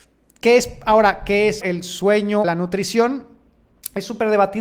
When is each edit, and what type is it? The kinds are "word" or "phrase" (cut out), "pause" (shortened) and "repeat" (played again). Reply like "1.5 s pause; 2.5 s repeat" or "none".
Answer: 1.6 s word; 2.4 s word